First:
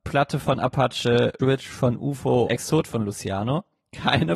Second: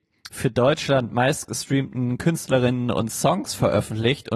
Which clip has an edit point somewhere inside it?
first; 2 cuts; at 1.4 s, 2.5 s

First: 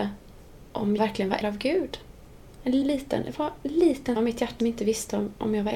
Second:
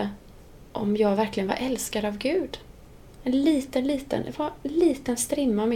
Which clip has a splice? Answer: first; 5 cuts; at 1.0 s, 1.4 s, 2.8 s, 4.2 s, 4.6 s

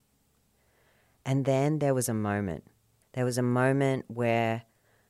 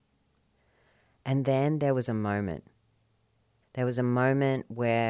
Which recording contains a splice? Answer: first; 1 cut; at 2.9 s

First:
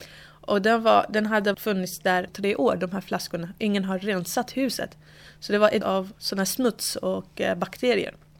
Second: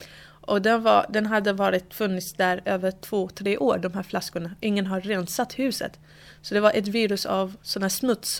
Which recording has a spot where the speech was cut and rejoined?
first; 3 cuts; at 1.5 s, 2.3 s, 5.8 s

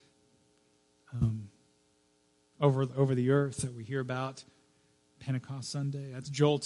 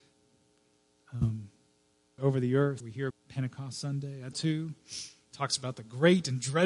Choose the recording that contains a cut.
second; 4 cuts; at 2.2 s, 2.8 s, 3.1 s, 4.3 s

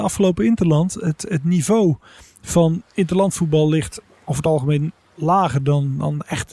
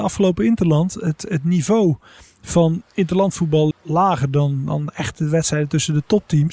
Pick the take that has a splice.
second; 1 cut; at 3.7 s

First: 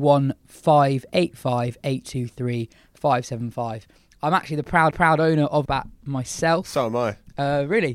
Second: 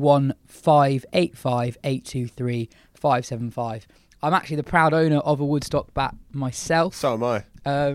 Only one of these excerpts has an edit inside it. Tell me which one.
first; 2 cuts; at 4.9 s, 5.7 s

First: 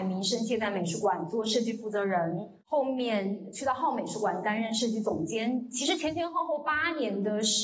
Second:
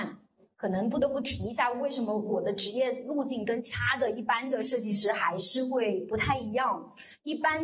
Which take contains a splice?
first; 1 cut; at 2.6 s

